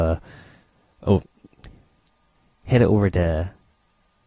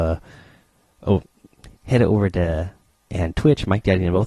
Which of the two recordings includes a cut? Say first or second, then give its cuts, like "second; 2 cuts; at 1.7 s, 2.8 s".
second; 2 cuts; at 1.7 s, 3.1 s